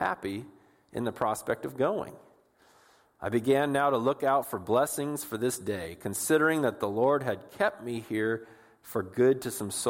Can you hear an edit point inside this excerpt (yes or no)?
no